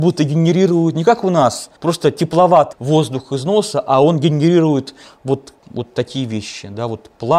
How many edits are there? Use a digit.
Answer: 3